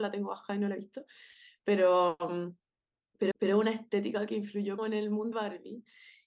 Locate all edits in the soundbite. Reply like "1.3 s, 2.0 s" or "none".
3.3 s, 4.8 s, 5.3 s